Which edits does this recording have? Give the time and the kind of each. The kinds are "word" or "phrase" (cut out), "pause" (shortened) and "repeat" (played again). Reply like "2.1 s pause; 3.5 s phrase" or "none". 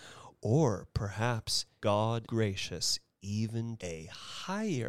1.8 s word; 2.2 s word; 3.8 s word